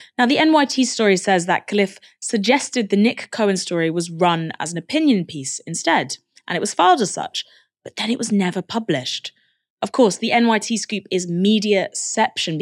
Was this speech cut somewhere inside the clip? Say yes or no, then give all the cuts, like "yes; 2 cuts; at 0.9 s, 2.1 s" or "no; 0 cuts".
no; 0 cuts